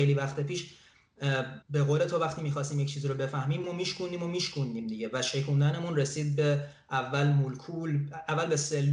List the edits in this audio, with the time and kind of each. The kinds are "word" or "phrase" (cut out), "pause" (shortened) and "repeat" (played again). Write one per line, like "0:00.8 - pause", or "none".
0:01.6 - pause
0:03.6 - word